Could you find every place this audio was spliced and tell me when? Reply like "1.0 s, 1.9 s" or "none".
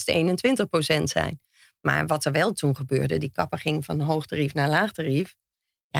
none